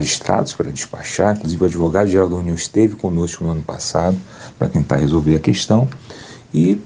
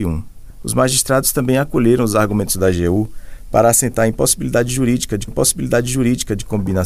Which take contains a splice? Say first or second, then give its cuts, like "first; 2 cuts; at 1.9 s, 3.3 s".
second; 1 cut; at 5.3 s